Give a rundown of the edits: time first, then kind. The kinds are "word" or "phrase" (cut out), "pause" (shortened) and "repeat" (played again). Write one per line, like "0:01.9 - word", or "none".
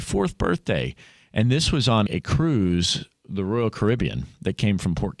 0:02.1 - word